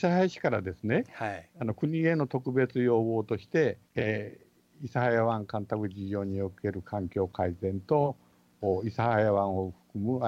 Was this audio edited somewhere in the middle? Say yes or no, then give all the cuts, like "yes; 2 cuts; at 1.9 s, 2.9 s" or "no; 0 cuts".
yes; 1 cut; at 3.9 s